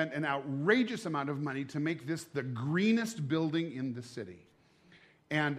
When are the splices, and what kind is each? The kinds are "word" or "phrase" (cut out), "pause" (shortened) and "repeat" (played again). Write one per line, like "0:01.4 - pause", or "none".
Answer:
none